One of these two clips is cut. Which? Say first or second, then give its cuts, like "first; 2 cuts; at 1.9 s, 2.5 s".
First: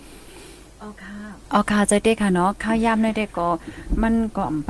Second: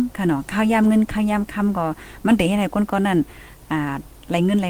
first; 1 cut; at 1.4 s